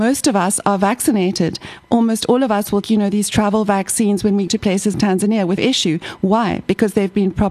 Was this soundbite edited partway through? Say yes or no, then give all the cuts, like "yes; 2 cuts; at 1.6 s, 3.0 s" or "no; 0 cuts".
yes; 4 cuts; at 2.8 s, 4.5 s, 4.9 s, 5.6 s